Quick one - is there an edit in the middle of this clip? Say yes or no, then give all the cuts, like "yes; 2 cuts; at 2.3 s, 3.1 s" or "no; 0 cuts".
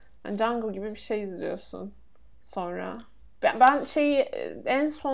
yes; 1 cut; at 2.3 s